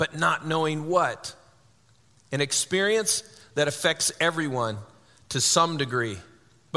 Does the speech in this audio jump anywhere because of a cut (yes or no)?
no